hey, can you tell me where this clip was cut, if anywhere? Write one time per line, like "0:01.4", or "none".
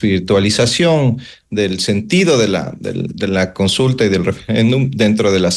none